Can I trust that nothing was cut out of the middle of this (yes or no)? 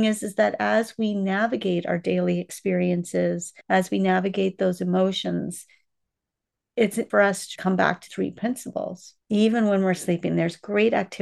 no